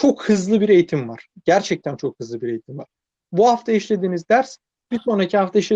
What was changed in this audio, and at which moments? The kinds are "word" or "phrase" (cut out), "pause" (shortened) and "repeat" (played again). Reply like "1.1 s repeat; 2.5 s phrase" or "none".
none